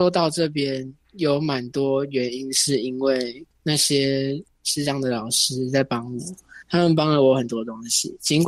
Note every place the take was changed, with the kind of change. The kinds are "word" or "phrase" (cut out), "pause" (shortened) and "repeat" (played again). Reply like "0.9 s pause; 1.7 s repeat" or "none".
6.6 s pause